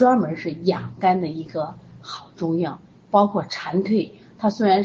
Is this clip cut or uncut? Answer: uncut